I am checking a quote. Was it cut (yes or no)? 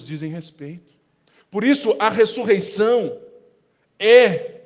no